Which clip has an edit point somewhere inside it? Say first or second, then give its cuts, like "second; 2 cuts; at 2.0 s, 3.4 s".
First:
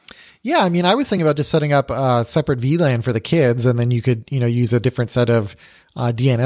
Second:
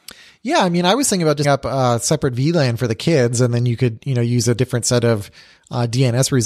second; 1 cut; at 1.4 s